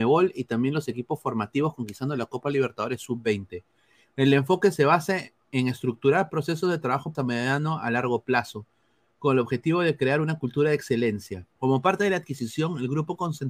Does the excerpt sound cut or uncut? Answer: cut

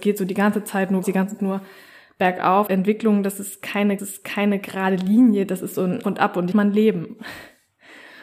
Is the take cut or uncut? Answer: cut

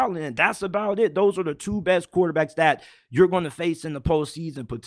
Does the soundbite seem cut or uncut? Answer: uncut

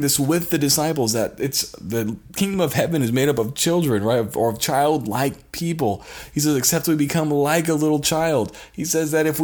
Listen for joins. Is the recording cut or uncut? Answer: uncut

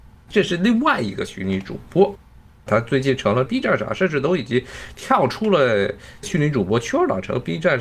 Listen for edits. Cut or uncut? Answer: uncut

